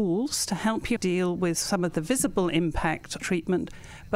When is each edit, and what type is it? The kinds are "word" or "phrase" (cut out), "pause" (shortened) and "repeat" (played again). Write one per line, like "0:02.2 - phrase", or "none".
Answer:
0:01.0 - word
0:03.2 - phrase